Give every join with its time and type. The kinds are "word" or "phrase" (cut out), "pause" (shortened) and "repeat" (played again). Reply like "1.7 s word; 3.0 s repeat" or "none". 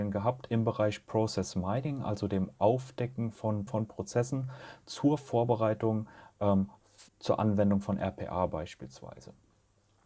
3.7 s phrase; 7.1 s pause